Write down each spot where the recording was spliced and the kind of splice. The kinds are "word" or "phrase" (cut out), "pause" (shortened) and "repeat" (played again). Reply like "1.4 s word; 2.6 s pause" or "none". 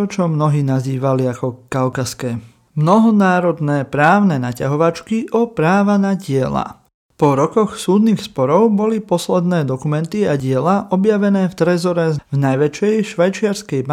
none

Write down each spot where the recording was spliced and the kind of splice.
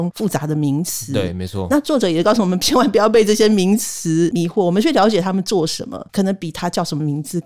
6.1 s pause

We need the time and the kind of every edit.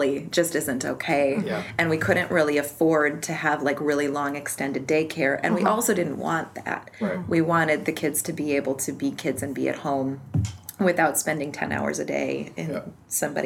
none

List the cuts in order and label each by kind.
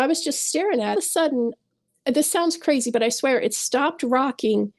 0.9 s phrase

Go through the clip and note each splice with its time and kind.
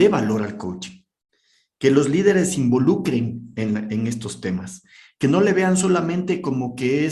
none

